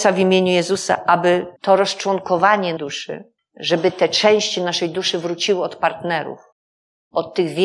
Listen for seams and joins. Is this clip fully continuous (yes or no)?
no